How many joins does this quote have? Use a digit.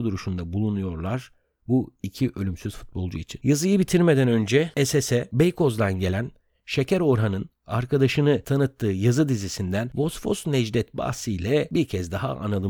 0